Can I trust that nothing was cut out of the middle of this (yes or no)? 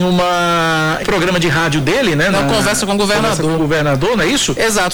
no